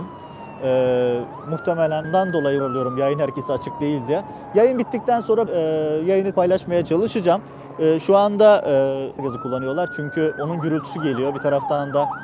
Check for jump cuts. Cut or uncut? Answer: cut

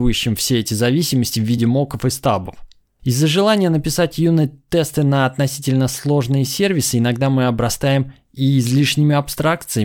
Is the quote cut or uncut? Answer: uncut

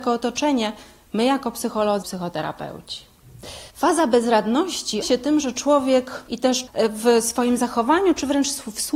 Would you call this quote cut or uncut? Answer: cut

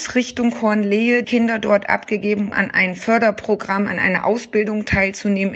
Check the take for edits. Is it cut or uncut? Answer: cut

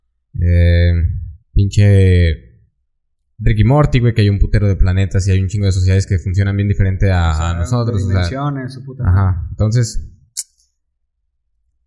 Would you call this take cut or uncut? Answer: cut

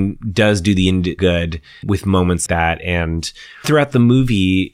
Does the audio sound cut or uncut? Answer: cut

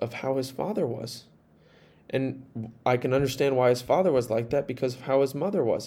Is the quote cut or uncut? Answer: uncut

